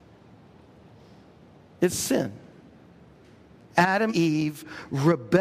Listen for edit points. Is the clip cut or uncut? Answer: cut